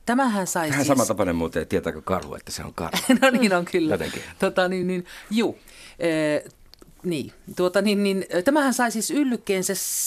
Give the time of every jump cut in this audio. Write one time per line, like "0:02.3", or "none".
none